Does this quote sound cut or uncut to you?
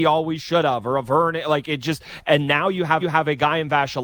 cut